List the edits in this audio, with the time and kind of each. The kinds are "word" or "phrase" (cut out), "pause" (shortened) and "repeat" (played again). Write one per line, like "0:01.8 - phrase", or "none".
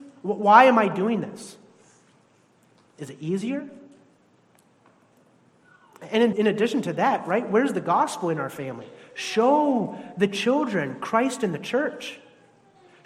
0:06.3 - word